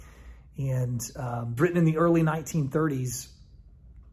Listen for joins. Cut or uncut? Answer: cut